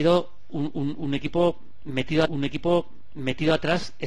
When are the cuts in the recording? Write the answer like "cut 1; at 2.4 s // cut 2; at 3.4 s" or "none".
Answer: cut 1; at 2.3 s